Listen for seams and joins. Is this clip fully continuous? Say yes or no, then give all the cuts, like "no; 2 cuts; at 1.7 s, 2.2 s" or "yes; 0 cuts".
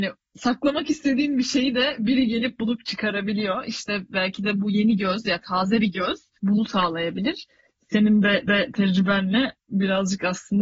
no; 1 cut; at 8.5 s